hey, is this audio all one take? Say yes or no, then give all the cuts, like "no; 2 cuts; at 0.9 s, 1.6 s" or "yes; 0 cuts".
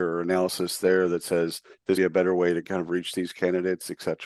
no; 1 cut; at 2.0 s